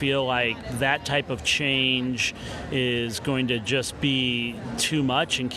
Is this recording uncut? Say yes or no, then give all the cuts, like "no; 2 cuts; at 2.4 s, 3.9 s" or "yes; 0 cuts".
yes; 0 cuts